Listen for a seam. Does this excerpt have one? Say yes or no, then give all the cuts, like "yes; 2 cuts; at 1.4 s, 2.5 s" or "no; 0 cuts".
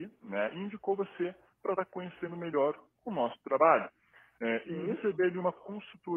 yes; 1 cut; at 4.6 s